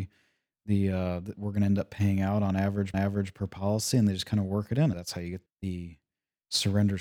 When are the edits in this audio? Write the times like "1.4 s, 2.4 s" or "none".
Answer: 2.9 s, 4.9 s, 5.5 s